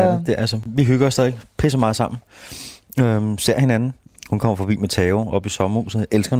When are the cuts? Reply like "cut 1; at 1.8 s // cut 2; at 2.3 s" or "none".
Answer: none